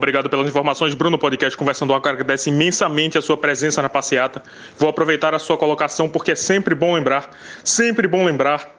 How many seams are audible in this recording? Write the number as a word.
zero